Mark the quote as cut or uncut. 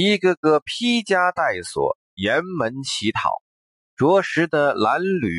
uncut